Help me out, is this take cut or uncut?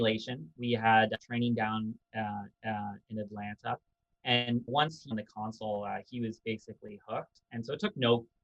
cut